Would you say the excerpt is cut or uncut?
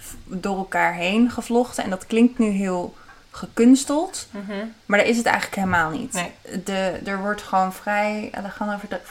uncut